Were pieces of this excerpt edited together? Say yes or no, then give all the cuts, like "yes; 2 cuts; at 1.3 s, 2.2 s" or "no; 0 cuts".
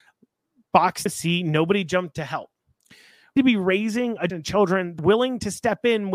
yes; 5 cuts; at 1.1 s, 2.1 s, 3.4 s, 4.3 s, 5.0 s